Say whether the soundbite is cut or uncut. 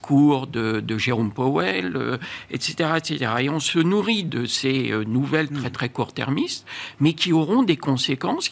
uncut